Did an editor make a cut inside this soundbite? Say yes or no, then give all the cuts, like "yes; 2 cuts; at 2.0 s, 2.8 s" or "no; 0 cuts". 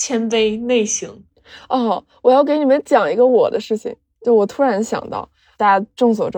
no; 0 cuts